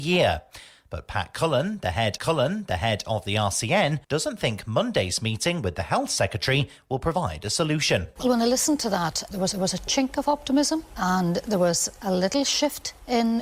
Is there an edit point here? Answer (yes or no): yes